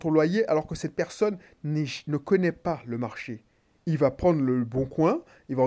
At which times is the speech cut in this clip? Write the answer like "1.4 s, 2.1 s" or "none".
none